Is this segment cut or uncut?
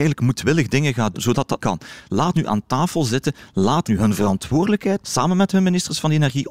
cut